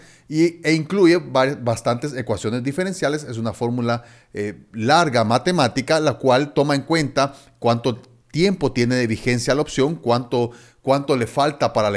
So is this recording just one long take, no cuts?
yes; 0 cuts

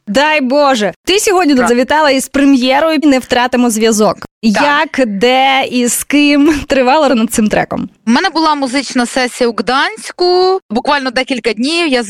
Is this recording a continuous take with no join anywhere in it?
no; 3 cuts; at 1.7 s, 3.0 s, 7.1 s

